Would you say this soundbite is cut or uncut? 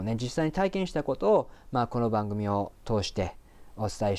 cut